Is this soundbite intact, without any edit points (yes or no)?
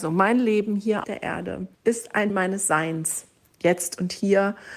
no